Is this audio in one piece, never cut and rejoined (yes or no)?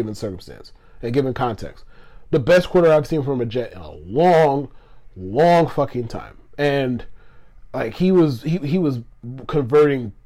yes